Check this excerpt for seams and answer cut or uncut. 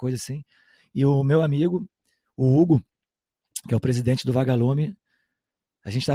uncut